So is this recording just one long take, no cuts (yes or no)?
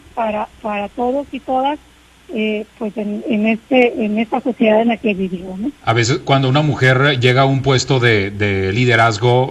yes